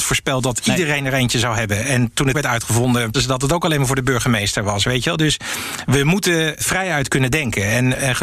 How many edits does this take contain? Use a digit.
3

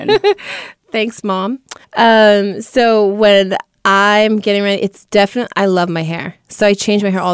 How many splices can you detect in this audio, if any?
1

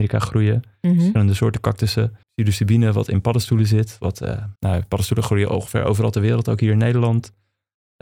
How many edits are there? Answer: 2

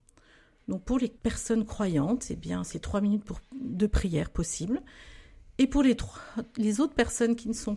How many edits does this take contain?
1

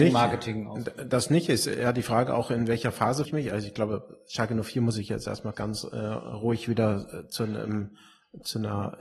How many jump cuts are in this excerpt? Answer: 2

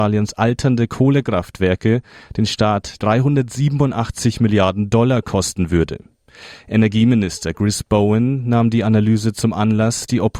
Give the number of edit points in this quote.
0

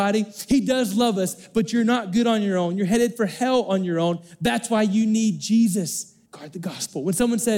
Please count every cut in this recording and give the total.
1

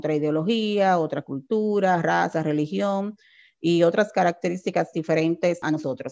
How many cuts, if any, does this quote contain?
0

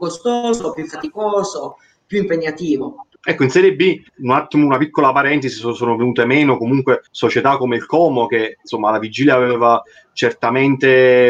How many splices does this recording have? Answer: 3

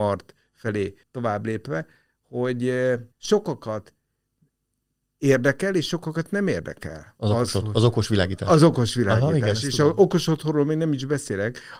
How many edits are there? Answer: 2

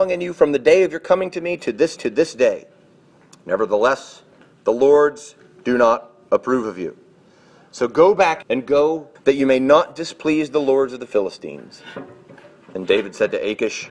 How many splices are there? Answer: 3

